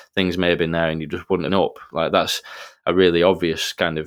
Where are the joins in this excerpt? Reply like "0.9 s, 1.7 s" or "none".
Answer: 1.5 s